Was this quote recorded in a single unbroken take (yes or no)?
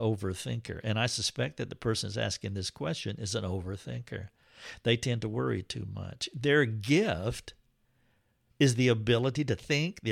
yes